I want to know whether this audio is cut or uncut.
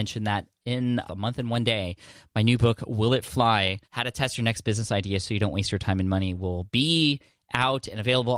cut